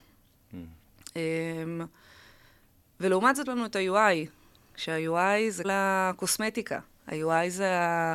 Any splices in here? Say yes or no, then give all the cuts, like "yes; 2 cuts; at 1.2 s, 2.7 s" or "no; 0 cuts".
yes; 2 cuts; at 3.4 s, 5.6 s